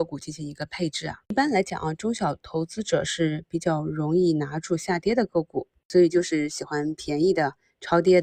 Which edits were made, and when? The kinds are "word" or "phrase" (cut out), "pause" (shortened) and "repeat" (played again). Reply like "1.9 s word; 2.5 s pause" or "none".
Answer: 1.2 s pause